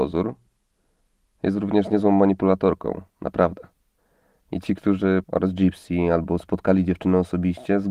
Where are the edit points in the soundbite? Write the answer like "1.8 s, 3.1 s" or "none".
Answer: 3.1 s, 5.2 s

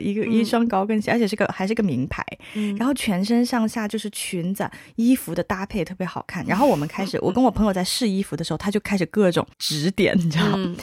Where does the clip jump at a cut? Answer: 9.5 s

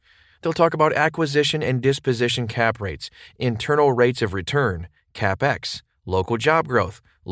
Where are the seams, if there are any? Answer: none

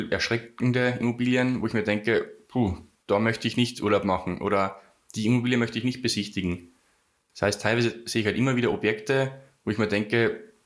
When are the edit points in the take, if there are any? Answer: none

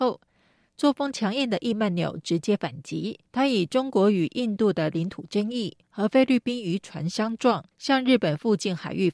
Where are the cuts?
3.3 s, 5.8 s, 7.7 s

